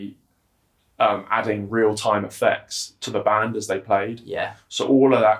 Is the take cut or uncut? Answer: uncut